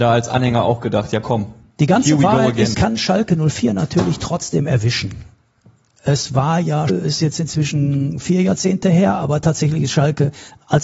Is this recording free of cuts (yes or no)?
no